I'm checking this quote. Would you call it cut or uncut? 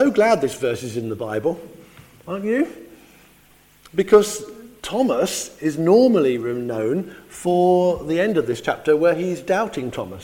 uncut